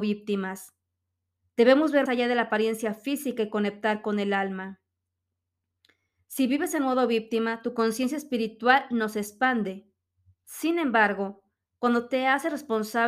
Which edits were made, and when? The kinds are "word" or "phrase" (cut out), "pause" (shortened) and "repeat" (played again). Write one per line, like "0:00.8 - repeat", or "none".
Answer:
0:02.1 - word